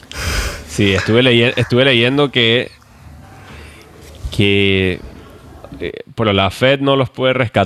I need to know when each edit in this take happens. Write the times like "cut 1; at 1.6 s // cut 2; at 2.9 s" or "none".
cut 1; at 6.2 s